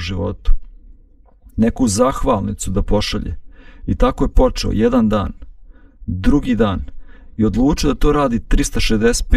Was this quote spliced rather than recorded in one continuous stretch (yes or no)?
no